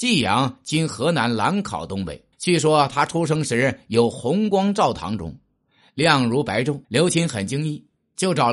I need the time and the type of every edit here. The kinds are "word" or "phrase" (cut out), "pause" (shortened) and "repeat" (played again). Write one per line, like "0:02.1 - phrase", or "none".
0:02.3 - pause
0:06.8 - pause

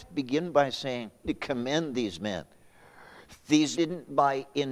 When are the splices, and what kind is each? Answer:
0:01.2 - phrase
0:03.8 - word

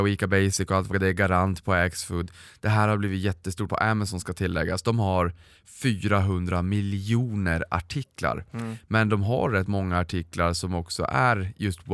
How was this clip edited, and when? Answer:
0:00.9 - phrase
0:03.7 - word

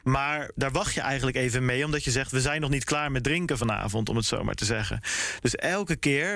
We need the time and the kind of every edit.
none

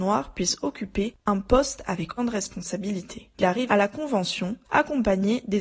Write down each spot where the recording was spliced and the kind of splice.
0:02.2 - word
0:03.7 - word

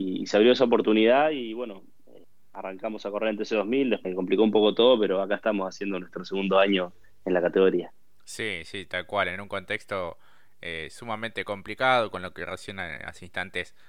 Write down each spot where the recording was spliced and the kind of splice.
0:04.0 - phrase

